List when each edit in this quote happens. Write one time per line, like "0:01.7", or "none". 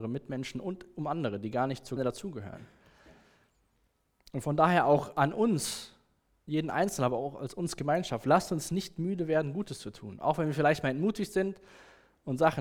0:02.0

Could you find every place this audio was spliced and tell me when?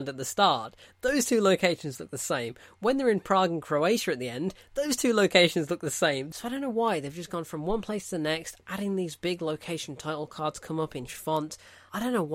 0:11.1

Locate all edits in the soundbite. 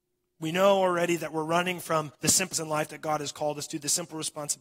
0:02.1
0:02.5

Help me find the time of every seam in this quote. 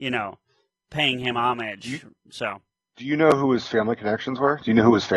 none

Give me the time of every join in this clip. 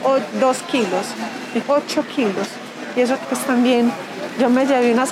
0:01.6
0:03.2

